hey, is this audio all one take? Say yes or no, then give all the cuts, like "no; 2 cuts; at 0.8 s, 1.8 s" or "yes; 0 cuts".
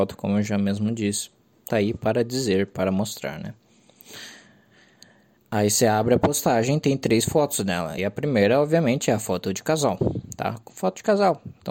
no; 2 cuts; at 1.7 s, 8.0 s